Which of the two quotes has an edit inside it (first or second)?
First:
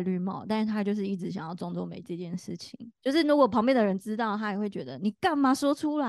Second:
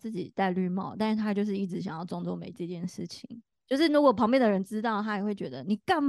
first